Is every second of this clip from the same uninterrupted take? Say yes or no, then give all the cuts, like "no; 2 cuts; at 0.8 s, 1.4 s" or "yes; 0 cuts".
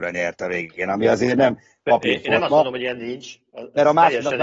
yes; 0 cuts